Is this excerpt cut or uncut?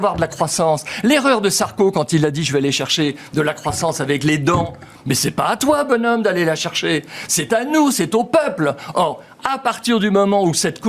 uncut